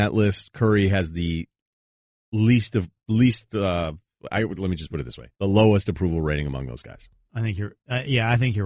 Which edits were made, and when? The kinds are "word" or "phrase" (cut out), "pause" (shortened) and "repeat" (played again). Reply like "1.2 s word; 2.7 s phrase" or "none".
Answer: 5.3 s pause